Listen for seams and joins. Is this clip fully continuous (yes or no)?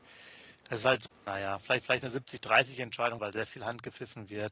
no